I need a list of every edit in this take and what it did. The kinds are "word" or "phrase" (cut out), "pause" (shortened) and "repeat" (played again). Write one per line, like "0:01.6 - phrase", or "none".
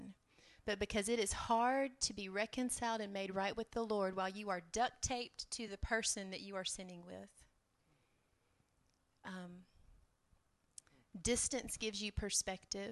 none